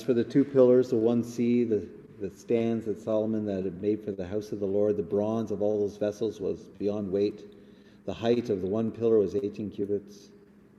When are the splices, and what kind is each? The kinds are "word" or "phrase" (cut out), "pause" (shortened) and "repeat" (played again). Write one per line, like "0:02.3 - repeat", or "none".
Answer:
none